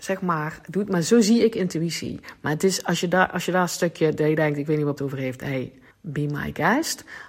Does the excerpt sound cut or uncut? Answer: cut